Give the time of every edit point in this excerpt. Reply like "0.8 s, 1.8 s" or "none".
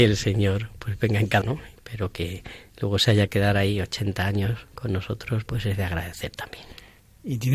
1.4 s, 3.3 s, 5.5 s